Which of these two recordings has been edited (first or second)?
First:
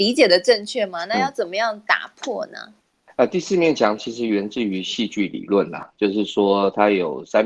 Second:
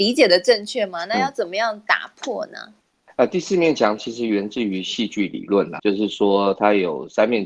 second